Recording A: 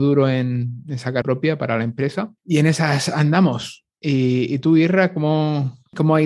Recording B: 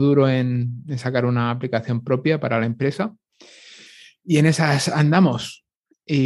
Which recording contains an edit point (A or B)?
A